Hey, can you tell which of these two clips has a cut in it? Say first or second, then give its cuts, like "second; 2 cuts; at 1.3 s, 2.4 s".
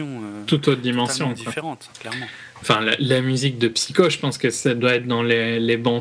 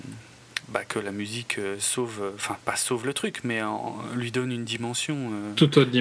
first; 2 cuts; at 1.9 s, 2.6 s